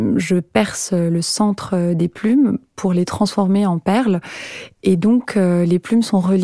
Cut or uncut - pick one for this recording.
uncut